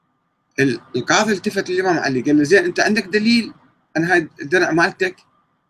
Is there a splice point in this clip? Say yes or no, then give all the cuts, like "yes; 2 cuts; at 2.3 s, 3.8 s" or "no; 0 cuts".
no; 0 cuts